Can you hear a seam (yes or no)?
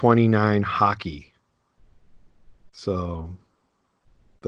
yes